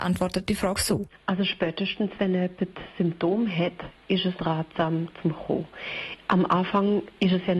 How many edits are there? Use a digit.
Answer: 1